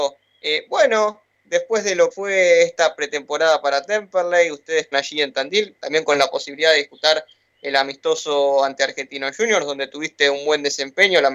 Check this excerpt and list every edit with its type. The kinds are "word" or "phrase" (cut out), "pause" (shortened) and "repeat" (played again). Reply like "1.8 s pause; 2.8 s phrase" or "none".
2.1 s word; 4.9 s word

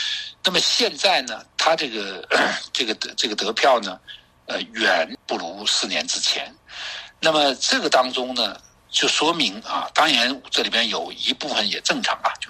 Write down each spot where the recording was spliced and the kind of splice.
none

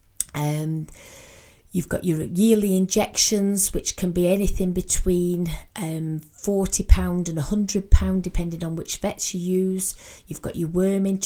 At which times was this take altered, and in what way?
5.7 s pause

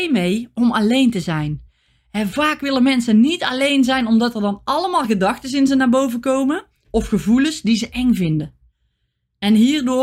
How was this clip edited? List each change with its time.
none

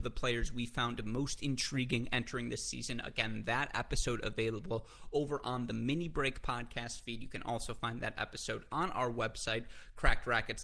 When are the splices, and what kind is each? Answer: none

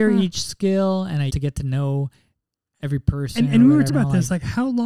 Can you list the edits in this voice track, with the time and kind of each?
1.3 s word; 3.9 s word

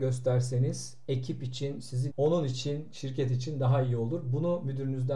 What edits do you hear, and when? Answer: 2.1 s word

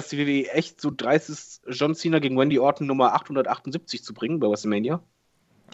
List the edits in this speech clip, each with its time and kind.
none

